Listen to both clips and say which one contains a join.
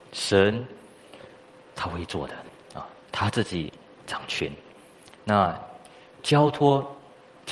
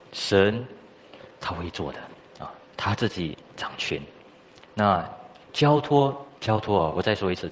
second; 4 cuts; at 1.3 s, 3.5 s, 5.4 s, 6.4 s

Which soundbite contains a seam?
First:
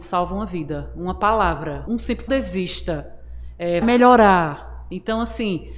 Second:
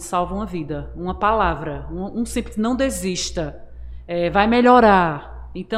first; 3 cuts; at 1.9 s, 2.3 s, 3.8 s

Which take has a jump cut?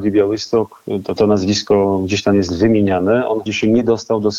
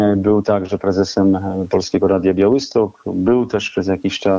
first; 2 cuts; at 1.2 s, 3.5 s

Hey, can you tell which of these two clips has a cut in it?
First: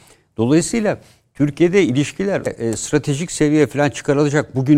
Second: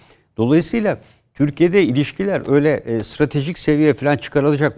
first; 1 cut; at 2.5 s

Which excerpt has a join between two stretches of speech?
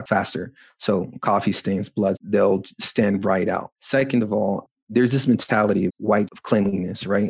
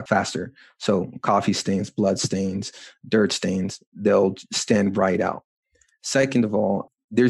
first; 4 cuts; at 2.2 s, 3.8 s, 5.9 s, 6.3 s

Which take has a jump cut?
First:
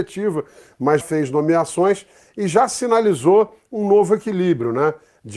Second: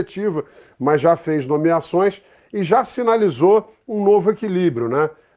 first; 1 cut; at 1.0 s

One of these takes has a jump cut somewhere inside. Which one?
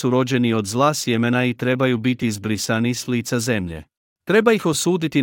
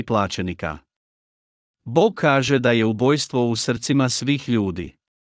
first; 1 cut; at 4.0 s

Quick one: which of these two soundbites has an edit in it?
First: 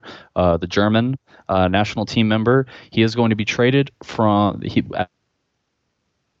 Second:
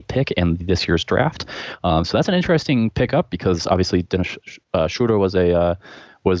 second; 1 cut; at 4.4 s

